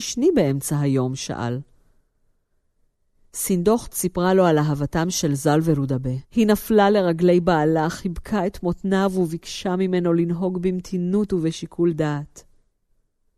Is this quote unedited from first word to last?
no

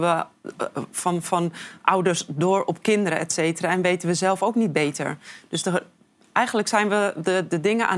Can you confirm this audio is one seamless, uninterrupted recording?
yes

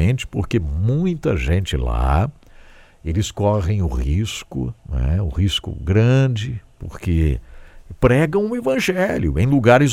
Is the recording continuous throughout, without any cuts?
yes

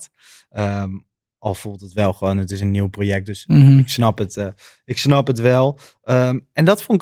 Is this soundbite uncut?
yes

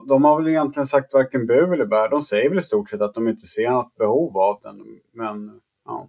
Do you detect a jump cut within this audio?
no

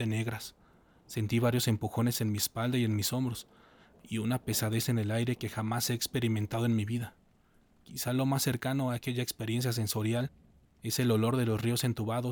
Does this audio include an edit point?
no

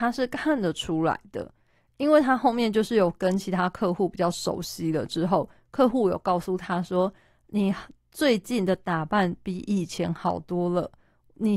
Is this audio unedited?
yes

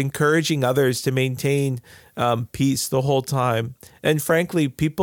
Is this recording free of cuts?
yes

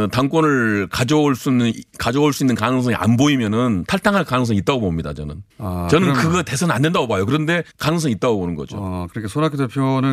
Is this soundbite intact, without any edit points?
no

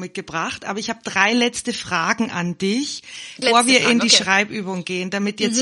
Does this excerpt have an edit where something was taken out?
yes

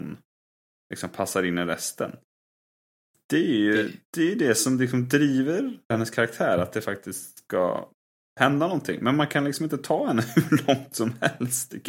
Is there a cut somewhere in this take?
yes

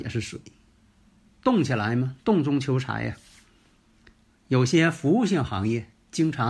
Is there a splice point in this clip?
no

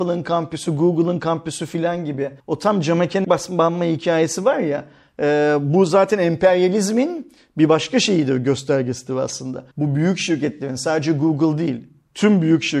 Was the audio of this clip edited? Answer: yes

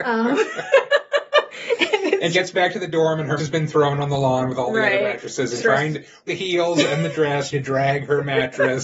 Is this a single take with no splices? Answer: no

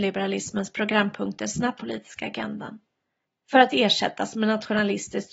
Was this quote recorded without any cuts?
no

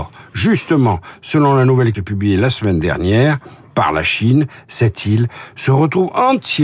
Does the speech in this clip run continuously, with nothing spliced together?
no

